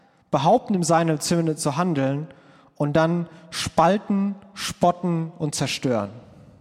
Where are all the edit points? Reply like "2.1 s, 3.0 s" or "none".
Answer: none